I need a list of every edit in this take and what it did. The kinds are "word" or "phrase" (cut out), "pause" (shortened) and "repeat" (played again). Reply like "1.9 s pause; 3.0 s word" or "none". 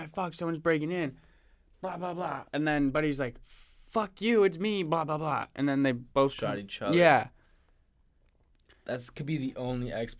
2.5 s pause; 3.4 s pause; 6.1 s pause